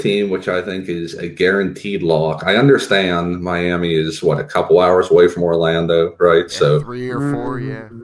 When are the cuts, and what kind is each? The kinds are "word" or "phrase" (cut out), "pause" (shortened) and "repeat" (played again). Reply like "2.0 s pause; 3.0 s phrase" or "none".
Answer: none